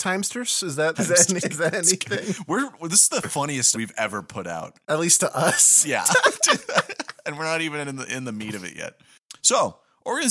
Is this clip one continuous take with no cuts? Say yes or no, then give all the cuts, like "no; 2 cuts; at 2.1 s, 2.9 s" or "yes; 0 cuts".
no; 4 cuts; at 0.9 s, 1.4 s, 3.7 s, 4.8 s